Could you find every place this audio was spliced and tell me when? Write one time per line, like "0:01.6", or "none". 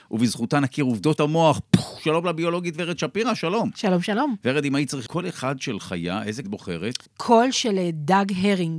0:01.2
0:05.1
0:06.4
0:07.1